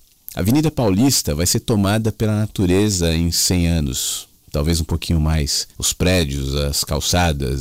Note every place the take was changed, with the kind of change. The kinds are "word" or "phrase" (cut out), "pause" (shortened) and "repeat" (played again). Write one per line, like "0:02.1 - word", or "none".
0:05.7 - pause